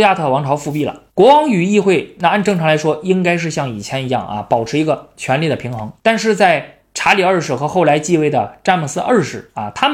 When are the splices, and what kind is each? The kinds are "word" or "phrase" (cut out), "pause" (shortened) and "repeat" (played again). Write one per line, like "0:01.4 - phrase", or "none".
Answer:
0:01.1 - pause
0:06.0 - pause

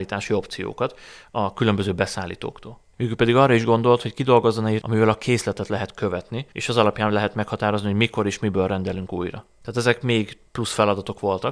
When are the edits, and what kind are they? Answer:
0:04.8 - word
0:06.5 - pause

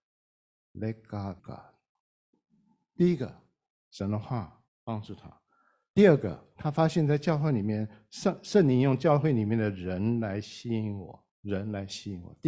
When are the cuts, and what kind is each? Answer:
0:01.4 - word
0:04.7 - pause
0:11.3 - pause

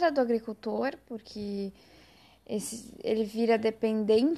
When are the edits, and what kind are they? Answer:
none

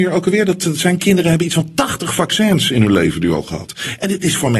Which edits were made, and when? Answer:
none

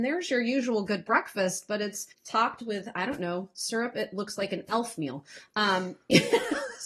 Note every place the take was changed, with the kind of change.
0:02.1 - pause

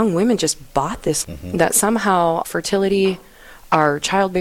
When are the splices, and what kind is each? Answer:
0:01.2 - word
0:02.4 - word

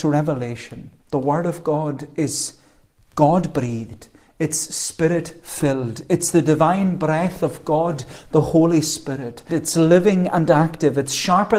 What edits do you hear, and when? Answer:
0:01.0 - pause
0:09.5 - word

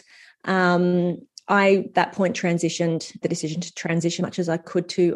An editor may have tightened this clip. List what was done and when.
0:01.9 - word
0:03.2 - word
0:04.2 - word

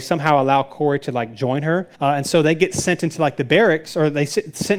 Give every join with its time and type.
0:01.9 - pause

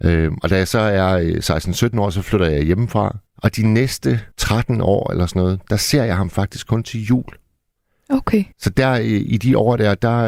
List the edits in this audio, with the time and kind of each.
0:03.3 - pause
0:04.3 - pause
0:08.5 - pause

